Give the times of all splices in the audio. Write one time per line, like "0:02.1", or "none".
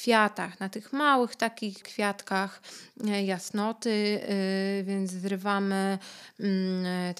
0:01.8